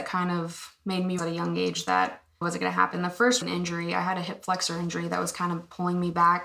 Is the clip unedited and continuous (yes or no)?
no